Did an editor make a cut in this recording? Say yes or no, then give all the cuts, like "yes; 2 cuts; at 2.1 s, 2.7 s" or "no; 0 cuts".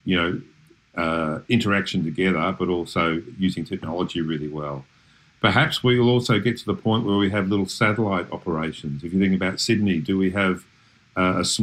no; 0 cuts